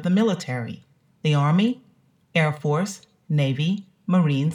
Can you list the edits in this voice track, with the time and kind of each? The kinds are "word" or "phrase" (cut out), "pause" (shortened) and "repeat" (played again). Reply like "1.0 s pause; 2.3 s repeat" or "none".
none